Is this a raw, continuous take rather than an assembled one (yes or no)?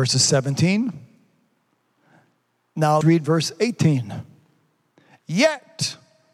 no